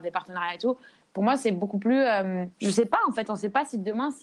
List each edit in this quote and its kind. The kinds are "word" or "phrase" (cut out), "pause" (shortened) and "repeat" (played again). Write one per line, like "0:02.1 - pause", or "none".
0:02.5 - pause